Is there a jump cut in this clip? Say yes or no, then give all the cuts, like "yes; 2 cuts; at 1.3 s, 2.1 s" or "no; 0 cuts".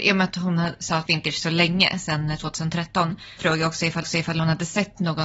yes; 3 cuts; at 1.1 s, 3.4 s, 4.0 s